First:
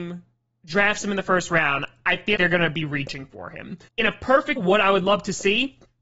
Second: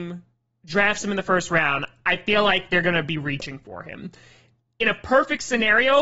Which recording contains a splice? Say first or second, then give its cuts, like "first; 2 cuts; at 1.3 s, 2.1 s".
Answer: first; 3 cuts; at 2.4 s, 3.9 s, 4.6 s